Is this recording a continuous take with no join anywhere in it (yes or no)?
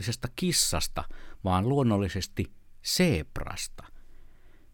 yes